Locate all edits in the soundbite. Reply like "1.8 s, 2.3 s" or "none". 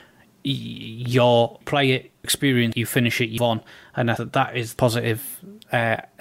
1.6 s, 2.2 s, 2.7 s, 3.4 s, 4.2 s, 4.8 s